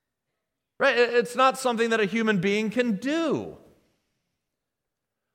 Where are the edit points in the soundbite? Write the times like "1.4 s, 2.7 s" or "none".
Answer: none